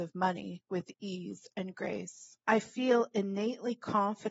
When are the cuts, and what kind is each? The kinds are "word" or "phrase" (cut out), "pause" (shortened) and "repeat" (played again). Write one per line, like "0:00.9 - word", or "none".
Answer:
0:02.4 - pause